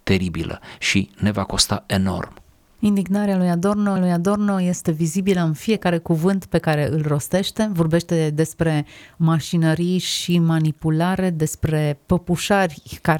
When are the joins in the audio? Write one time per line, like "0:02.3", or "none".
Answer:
0:04.0